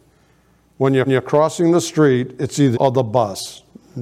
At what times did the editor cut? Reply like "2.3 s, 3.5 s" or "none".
1.1 s, 2.7 s